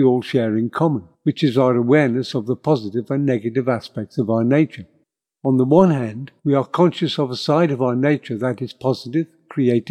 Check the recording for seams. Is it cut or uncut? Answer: cut